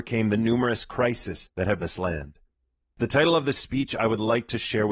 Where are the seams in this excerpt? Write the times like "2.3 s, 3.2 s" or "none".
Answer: 1.8 s